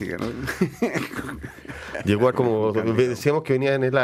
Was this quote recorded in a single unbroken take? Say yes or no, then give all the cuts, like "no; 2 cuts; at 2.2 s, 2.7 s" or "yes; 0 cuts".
no; 1 cut; at 2.3 s